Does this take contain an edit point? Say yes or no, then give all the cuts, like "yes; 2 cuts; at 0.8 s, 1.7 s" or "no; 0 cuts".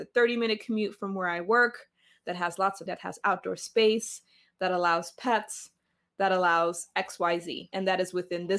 yes; 1 cut; at 2.9 s